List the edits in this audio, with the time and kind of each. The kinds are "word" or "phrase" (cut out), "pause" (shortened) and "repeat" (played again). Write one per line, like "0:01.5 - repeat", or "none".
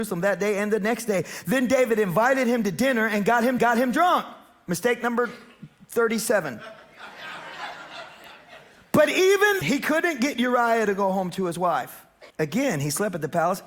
0:03.6 - repeat
0:09.6 - word
0:12.3 - pause